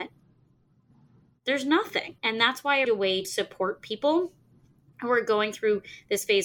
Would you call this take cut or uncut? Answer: cut